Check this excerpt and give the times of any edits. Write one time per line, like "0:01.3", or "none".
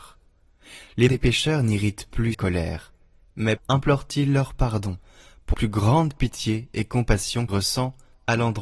0:01.1
0:02.3
0:03.6
0:05.5
0:07.5

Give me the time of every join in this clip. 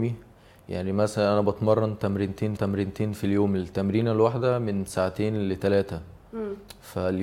0:02.6

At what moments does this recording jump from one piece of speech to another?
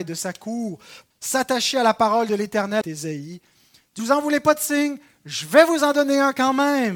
0:01.1
0:02.8
0:04.0

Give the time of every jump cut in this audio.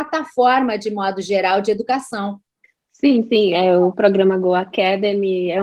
0:02.6

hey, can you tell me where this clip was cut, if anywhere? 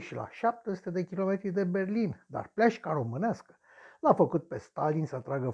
none

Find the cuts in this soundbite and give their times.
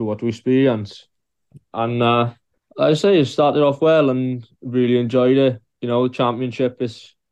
0:05.7

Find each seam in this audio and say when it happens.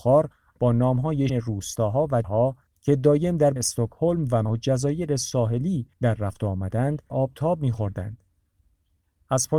0:01.3
0:02.2
0:02.7
0:03.6
0:04.4
0:05.9
0:07.1

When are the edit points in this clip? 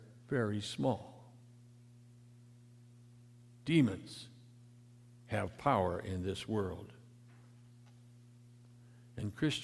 none

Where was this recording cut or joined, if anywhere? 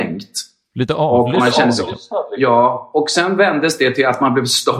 none

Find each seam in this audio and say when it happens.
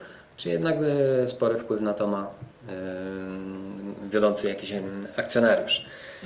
none

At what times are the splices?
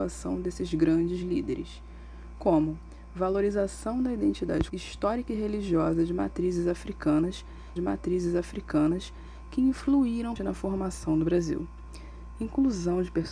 0:04.7
0:07.8
0:10.4

